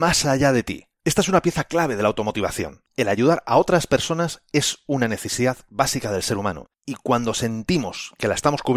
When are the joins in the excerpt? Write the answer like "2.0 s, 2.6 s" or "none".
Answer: 0.9 s, 2.9 s, 6.7 s